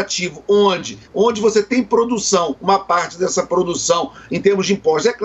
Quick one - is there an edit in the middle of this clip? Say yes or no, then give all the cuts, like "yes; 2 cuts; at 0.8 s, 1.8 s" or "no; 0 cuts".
yes; 1 cut; at 1.0 s